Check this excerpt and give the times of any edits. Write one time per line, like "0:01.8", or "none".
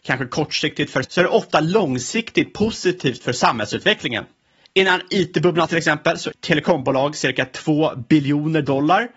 0:01.0
0:05.7
0:06.3